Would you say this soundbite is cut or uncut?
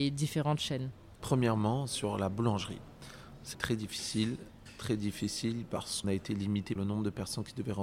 cut